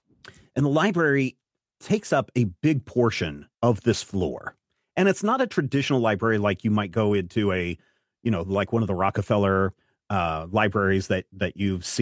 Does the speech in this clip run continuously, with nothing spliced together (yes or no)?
no